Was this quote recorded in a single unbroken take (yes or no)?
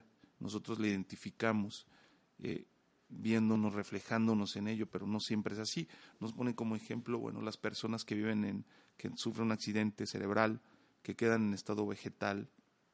yes